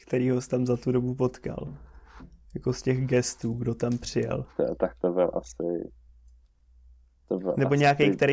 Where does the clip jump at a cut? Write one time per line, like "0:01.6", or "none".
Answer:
0:02.4
0:04.5